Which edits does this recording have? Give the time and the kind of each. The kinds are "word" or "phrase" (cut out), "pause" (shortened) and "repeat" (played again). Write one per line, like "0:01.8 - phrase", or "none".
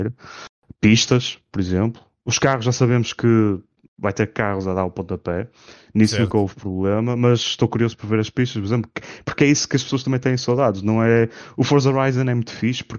none